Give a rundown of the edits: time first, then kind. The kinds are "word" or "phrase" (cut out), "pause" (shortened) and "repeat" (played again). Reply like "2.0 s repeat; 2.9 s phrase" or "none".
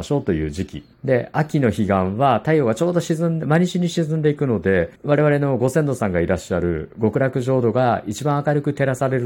0.9 s pause; 5.0 s pause